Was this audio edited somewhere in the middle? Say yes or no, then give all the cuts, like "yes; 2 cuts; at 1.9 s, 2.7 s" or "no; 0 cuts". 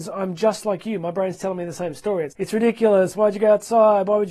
yes; 1 cut; at 2.3 s